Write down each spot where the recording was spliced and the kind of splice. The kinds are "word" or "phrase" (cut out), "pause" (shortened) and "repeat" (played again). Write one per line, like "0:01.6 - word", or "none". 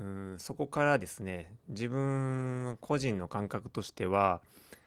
none